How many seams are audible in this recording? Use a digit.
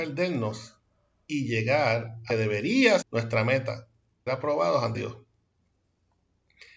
4